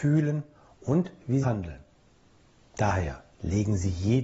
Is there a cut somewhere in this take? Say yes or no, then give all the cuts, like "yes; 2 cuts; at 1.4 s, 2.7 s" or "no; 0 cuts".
yes; 2 cuts; at 1.4 s, 3.3 s